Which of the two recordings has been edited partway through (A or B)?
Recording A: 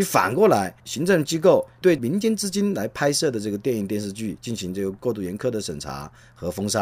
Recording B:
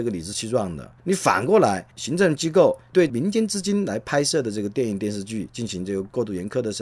B